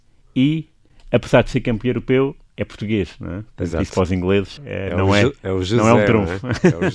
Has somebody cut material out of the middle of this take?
yes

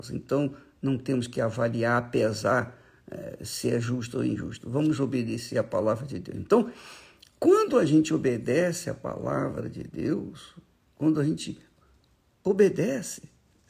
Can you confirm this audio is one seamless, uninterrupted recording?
yes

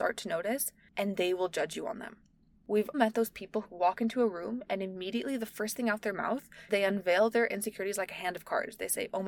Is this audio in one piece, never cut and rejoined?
no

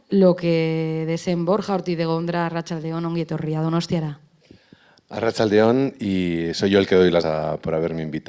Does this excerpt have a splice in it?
yes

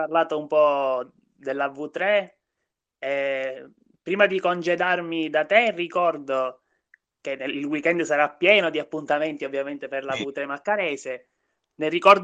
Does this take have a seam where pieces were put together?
no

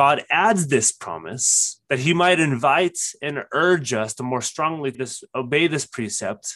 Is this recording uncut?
no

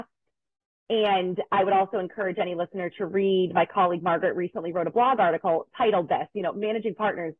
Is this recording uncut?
yes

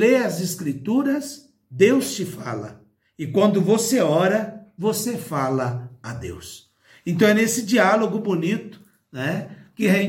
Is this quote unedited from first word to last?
yes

